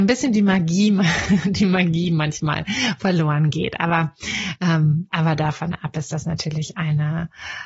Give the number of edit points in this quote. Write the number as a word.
zero